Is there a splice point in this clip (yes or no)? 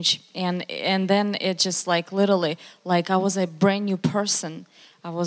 no